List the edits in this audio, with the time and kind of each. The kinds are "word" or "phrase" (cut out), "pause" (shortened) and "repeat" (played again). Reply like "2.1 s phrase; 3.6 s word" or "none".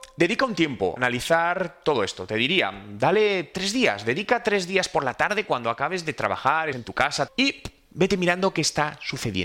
1.0 s word; 6.7 s word; 7.3 s word